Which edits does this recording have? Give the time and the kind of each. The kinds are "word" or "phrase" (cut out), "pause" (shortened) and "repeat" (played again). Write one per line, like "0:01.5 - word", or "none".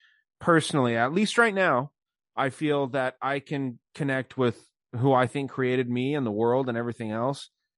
none